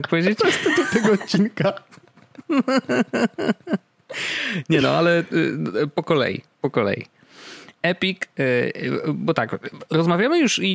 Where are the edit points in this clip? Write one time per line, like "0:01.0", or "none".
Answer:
none